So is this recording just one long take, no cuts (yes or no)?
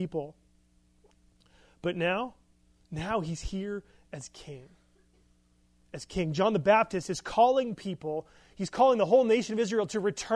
yes